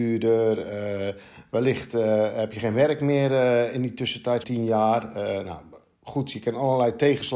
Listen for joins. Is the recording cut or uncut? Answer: cut